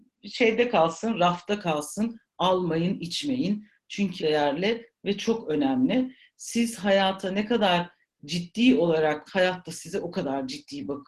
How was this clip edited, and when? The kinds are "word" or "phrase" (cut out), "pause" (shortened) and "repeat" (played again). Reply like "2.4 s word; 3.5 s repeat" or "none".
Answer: 4.2 s phrase; 9.3 s word